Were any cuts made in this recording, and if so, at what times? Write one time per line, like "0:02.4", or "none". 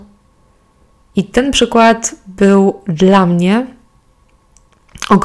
none